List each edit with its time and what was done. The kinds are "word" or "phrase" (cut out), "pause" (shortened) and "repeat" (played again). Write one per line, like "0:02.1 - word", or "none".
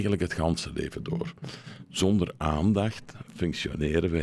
none